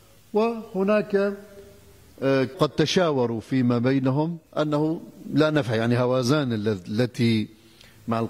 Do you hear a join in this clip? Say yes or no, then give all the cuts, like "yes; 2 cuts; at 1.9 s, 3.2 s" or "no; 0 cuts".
yes; 2 cuts; at 2.5 s, 4.5 s